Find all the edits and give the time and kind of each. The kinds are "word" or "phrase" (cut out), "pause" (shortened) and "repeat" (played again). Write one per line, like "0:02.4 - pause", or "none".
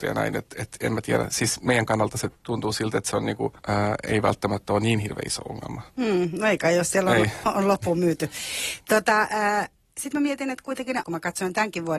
0:02.4 - pause
0:03.6 - pause
0:05.9 - pause
0:07.4 - word
0:11.0 - word